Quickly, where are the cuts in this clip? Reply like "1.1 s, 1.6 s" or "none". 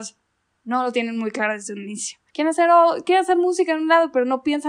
2.3 s